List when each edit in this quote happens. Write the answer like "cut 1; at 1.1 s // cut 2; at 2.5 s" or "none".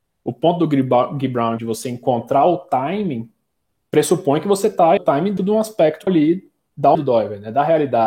cut 1; at 1.6 s // cut 2; at 5.0 s // cut 3; at 5.4 s // cut 4; at 6.1 s // cut 5; at 6.9 s